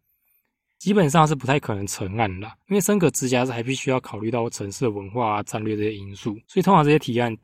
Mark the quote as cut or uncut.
cut